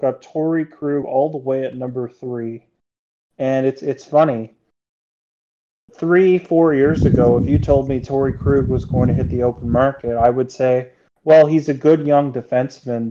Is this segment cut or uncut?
uncut